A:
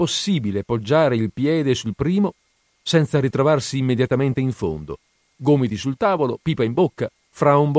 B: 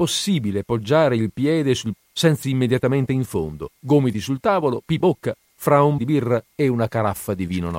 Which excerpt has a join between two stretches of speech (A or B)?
B